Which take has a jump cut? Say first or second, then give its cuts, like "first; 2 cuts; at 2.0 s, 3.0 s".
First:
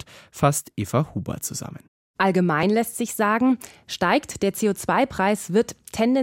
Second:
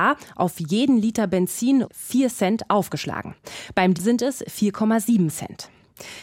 second; 2 cuts; at 1.8 s, 3.9 s